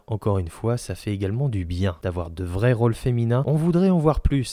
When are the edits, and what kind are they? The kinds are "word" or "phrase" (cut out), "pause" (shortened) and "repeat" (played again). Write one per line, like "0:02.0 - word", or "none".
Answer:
none